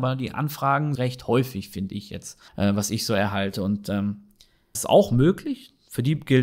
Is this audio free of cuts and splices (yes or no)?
no